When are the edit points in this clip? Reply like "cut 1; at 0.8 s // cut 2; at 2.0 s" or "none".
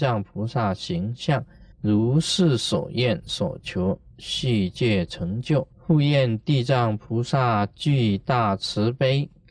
cut 1; at 1.7 s // cut 2; at 5.7 s